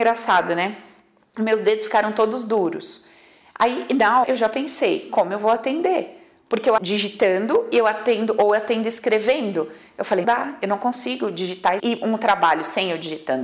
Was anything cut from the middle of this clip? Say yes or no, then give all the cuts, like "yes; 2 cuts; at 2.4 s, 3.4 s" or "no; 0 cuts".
yes; 4 cuts; at 4.2 s, 6.8 s, 10.2 s, 11.8 s